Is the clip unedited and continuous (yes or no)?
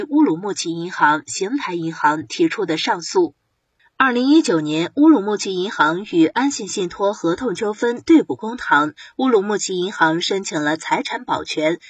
yes